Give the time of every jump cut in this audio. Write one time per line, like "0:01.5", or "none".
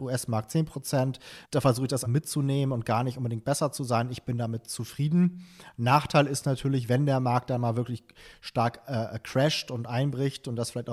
0:01.4
0:02.0